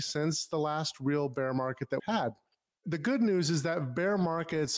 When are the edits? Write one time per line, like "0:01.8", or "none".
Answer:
0:02.0